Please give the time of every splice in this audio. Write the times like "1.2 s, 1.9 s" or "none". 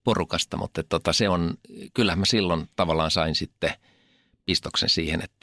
none